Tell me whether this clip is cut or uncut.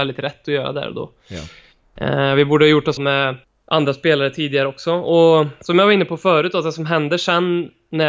cut